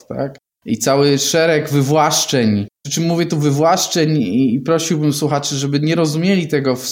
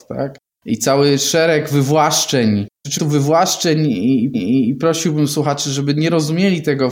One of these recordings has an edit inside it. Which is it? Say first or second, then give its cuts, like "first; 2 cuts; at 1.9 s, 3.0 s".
second; 2 cuts; at 3.0 s, 4.3 s